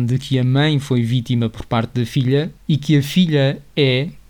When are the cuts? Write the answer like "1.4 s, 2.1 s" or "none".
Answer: 2.6 s